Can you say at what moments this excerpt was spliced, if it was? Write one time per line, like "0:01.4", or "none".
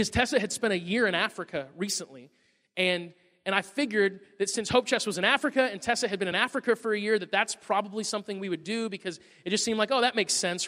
none